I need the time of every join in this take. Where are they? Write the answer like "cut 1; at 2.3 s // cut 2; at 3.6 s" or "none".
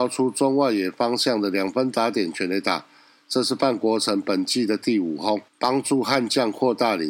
cut 1; at 5.5 s